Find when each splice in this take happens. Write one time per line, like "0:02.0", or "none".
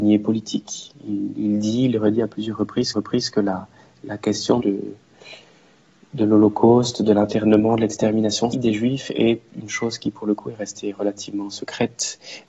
0:02.9
0:03.8
0:04.6
0:08.5